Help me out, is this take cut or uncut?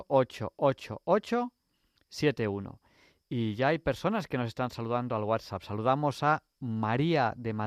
uncut